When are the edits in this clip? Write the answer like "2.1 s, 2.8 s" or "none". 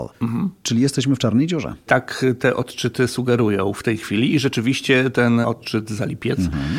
none